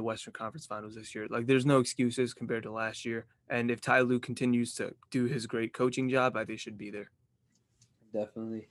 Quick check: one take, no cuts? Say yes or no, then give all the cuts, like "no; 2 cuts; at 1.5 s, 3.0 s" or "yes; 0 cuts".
no; 3 cuts; at 3.3 s, 5.0 s, 6.5 s